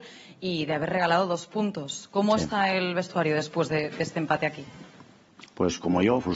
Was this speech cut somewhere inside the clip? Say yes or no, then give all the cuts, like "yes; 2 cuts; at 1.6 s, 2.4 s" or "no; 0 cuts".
no; 0 cuts